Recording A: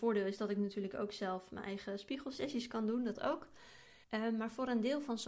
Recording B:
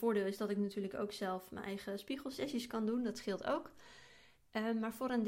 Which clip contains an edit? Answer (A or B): A